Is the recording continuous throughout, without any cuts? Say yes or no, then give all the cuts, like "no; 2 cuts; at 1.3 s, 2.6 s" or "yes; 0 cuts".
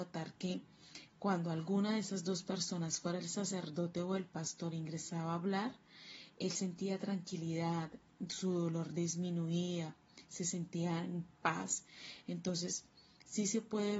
yes; 0 cuts